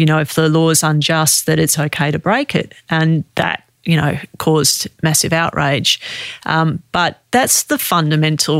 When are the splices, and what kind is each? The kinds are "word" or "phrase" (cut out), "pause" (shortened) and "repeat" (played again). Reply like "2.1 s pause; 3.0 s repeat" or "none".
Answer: none